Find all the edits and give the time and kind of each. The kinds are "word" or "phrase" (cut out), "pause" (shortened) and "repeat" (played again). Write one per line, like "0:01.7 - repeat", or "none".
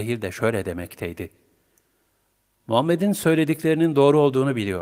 none